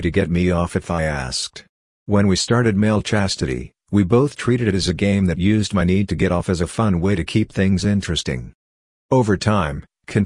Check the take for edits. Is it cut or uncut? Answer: uncut